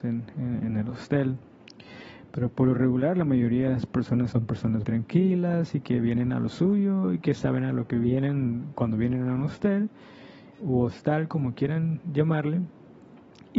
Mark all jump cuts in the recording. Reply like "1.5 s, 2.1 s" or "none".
4.3 s, 4.8 s, 10.6 s